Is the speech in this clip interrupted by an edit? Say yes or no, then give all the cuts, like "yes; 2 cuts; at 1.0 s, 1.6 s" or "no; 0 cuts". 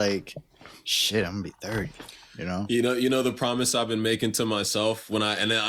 no; 0 cuts